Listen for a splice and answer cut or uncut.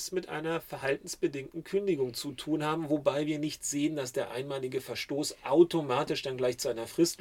uncut